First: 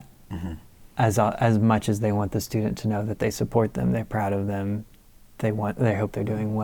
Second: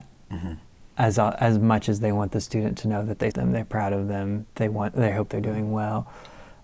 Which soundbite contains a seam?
second; 2 cuts; at 3.3 s, 4.5 s

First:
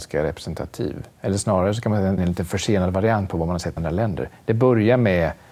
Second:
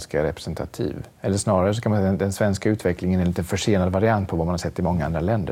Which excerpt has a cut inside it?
first; 2 cuts; at 2.2 s, 3.8 s

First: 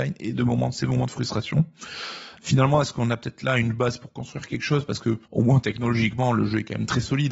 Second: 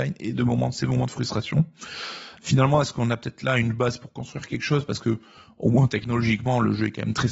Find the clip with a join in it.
first; 1 cut; at 5.3 s

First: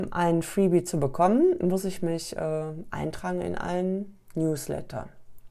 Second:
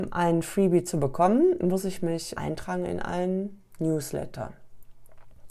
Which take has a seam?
second; 1 cut; at 2.3 s

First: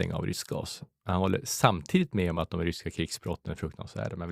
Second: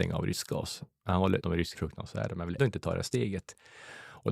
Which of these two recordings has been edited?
second; 3 cuts; at 1.4 s, 1.8 s, 2.6 s

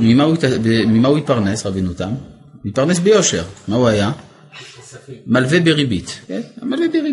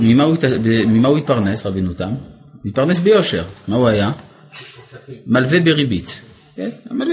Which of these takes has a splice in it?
first; 1 cut; at 6.2 s

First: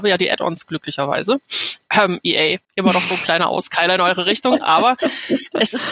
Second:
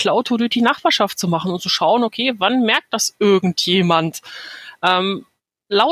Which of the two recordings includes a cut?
first; 1 cut; at 2.6 s

